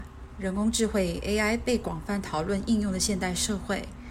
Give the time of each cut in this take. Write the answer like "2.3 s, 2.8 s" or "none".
none